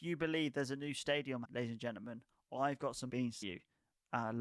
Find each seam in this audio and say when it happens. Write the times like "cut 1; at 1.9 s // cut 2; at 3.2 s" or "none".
cut 1; at 1.4 s // cut 2; at 3.1 s // cut 3; at 3.4 s